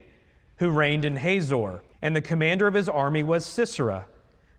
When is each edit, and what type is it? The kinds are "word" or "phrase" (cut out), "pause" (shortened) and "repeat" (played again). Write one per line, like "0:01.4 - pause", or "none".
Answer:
0:01.9 - pause